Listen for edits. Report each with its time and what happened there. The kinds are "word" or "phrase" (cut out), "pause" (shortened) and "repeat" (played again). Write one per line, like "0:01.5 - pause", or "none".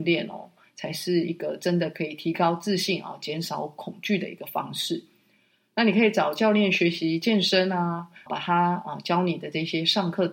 0:08.3 - word